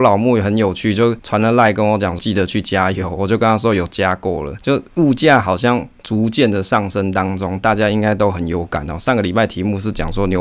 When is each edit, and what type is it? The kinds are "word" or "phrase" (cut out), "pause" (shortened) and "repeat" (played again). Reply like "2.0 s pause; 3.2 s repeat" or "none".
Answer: 2.2 s phrase